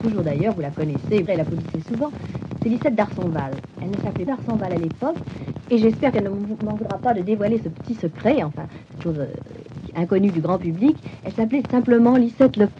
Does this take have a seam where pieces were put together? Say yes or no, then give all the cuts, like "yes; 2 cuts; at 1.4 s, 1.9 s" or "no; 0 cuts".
yes; 2 cuts; at 1.3 s, 4.3 s